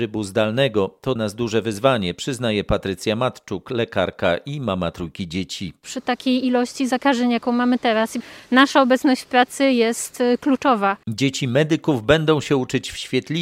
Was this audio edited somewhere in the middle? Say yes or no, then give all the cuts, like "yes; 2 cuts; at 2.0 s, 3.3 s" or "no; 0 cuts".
yes; 2 cuts; at 1.2 s, 11.0 s